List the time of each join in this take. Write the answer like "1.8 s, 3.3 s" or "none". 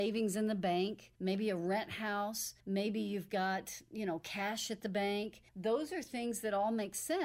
1.1 s, 2.6 s, 5.5 s